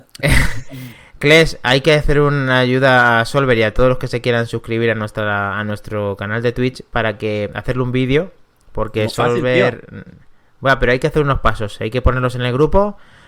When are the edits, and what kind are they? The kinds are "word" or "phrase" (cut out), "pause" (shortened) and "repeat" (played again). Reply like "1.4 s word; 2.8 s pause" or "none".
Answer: none

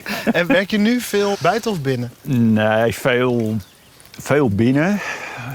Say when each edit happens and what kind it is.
1.3 s word

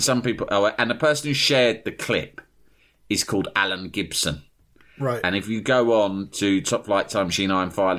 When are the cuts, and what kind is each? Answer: none

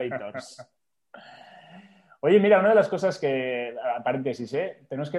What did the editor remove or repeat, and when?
none

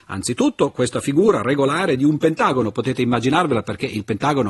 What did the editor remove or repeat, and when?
none

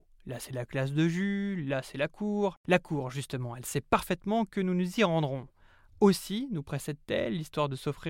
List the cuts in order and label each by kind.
none

